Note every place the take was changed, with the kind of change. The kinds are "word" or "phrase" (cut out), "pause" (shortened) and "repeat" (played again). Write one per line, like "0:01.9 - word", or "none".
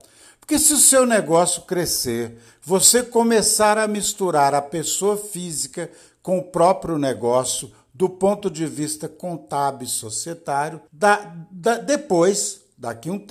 0:10.9 - pause